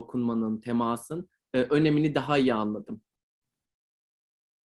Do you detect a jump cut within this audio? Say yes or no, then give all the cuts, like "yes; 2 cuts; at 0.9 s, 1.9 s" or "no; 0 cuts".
no; 0 cuts